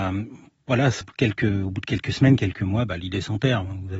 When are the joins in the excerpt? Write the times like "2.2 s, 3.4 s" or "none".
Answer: 1.0 s